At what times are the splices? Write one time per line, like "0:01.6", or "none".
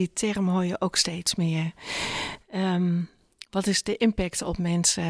none